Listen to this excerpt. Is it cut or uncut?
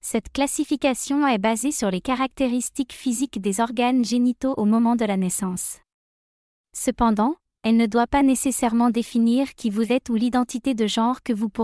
uncut